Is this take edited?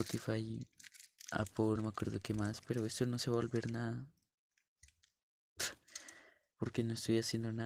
yes; 1 cut; at 1.8 s

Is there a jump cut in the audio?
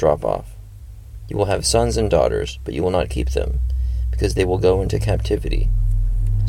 no; 0 cuts

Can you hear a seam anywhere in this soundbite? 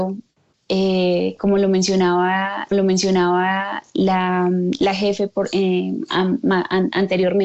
yes; 1 cut; at 2.7 s

